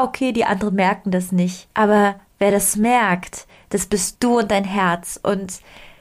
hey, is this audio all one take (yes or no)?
no